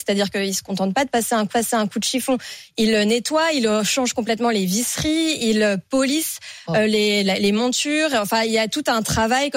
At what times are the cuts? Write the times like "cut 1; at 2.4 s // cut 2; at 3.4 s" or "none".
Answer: cut 1; at 1.5 s // cut 2; at 7.2 s

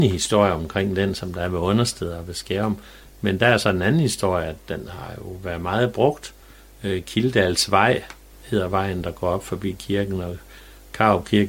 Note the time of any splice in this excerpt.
none

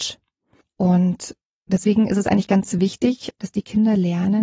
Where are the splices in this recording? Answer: none

